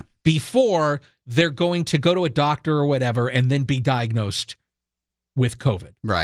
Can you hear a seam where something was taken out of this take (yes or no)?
no